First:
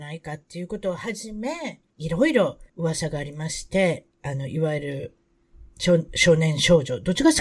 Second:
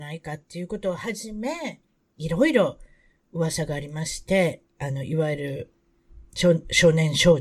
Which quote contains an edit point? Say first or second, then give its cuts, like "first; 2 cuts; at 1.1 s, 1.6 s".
first; 2 cuts; at 1.9 s, 2.7 s